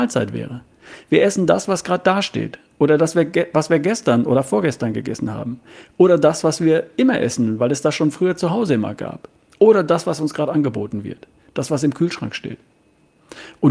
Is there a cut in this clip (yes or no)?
no